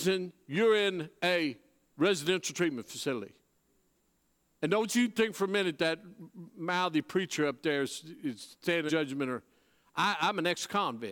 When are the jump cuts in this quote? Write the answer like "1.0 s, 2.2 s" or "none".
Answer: 8.9 s